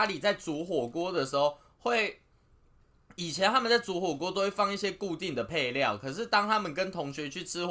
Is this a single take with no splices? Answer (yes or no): yes